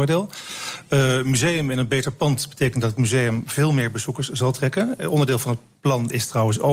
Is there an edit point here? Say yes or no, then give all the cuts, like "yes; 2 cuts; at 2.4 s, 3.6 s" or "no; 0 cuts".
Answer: no; 0 cuts